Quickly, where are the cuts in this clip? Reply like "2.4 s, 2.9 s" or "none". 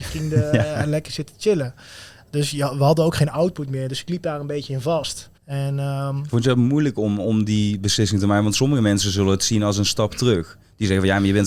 5.4 s